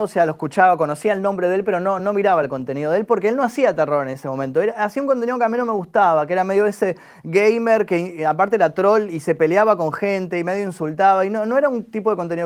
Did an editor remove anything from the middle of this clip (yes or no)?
no